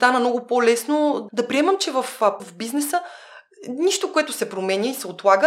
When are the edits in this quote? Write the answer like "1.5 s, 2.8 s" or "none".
1.3 s, 2.4 s

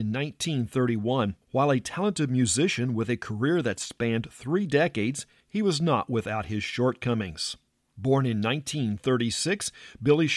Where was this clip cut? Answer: 1.4 s, 7.7 s

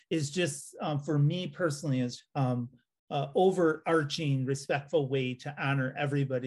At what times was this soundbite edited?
2.2 s

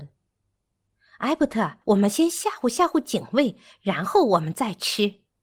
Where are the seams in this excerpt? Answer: 1.8 s

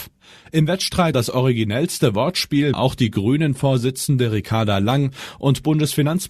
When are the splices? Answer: 1.1 s, 2.7 s

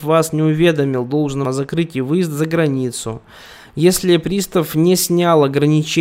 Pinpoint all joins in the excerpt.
1.4 s

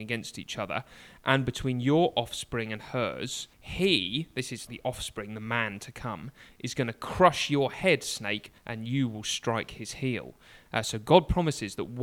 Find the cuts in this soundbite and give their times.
3.5 s, 4.7 s, 8.6 s

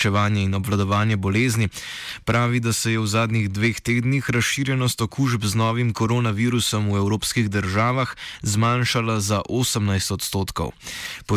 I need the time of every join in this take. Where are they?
none

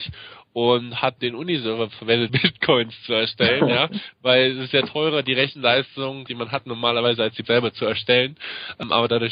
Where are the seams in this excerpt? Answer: 1.2 s, 2.3 s, 6.3 s, 7.4 s

